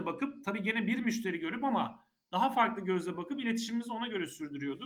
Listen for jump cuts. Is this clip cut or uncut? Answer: uncut